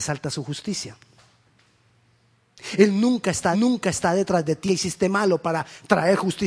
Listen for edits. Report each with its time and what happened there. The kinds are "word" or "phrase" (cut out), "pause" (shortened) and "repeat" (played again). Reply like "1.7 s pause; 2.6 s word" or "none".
3.5 s repeat; 4.7 s phrase